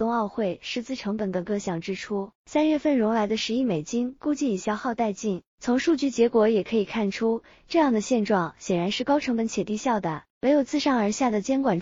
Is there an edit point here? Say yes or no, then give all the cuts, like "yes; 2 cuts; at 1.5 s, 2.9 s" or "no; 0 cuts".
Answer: yes; 3 cuts; at 2.4 s, 5.5 s, 10.3 s